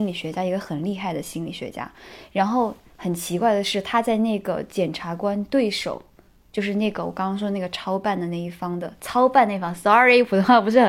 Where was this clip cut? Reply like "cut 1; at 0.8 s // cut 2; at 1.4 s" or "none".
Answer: none